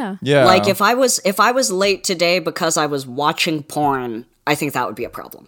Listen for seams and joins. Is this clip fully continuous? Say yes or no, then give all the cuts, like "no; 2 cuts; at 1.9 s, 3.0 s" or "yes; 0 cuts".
yes; 0 cuts